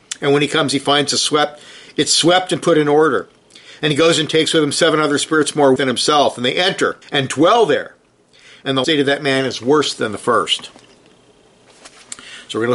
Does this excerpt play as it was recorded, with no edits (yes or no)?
no